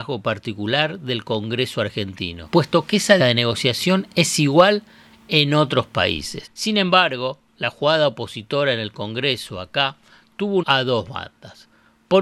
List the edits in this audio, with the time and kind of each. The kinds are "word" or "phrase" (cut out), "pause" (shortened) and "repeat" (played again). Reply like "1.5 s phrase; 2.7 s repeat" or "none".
3.2 s word; 7.5 s pause; 10.6 s word